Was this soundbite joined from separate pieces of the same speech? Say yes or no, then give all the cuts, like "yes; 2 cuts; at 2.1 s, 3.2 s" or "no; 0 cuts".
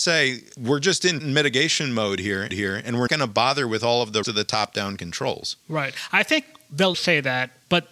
yes; 5 cuts; at 1.2 s, 2.5 s, 3.1 s, 4.2 s, 6.9 s